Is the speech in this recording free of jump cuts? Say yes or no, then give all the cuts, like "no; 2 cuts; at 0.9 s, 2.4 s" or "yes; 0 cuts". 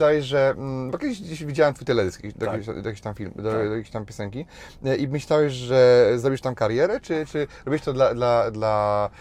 yes; 0 cuts